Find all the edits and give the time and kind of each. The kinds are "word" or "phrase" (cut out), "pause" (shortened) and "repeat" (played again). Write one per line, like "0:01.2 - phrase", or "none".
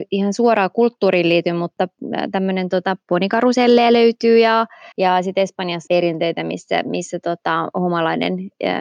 0:03.0 - word
0:04.9 - pause
0:05.9 - phrase